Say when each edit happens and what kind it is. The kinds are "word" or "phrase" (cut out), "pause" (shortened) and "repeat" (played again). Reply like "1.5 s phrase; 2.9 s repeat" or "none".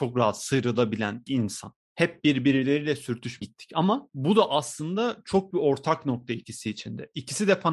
1.3 s word; 3.4 s word; 5.5 s word